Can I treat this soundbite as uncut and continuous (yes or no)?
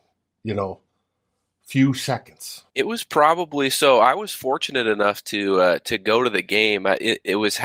no